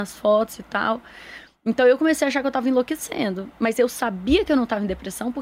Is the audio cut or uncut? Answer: uncut